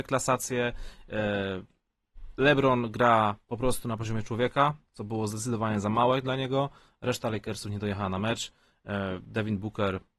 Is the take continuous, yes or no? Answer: yes